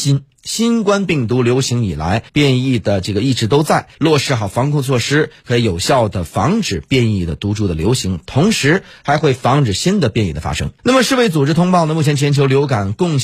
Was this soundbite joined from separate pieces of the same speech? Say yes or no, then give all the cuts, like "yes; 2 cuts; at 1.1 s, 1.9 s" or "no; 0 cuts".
yes; 3 cuts; at 2.3 s, 3.9 s, 10.8 s